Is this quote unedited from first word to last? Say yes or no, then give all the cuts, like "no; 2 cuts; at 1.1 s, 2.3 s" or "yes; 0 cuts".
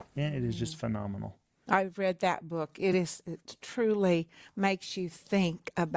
yes; 0 cuts